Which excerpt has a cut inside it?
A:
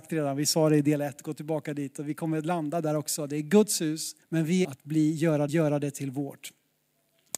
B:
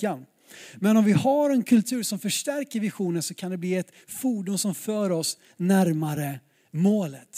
A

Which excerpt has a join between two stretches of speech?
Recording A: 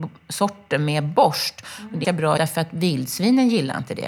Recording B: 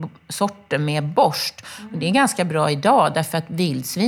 A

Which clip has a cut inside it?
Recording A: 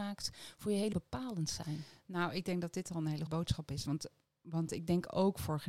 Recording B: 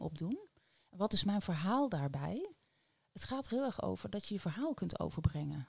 A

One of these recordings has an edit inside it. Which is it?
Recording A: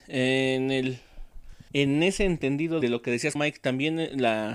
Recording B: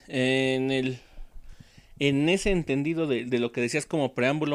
A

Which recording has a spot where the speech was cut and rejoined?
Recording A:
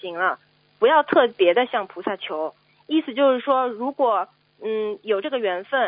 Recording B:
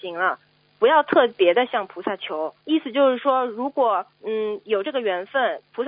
B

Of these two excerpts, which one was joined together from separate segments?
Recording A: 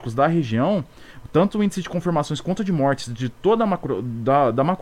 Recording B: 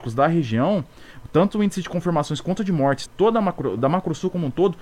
B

